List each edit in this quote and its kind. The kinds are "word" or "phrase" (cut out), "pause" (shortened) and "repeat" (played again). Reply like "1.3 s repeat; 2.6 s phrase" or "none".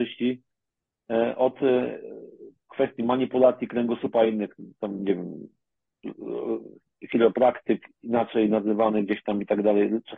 none